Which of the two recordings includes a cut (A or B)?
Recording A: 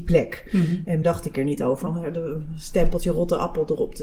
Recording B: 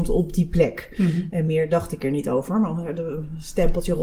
A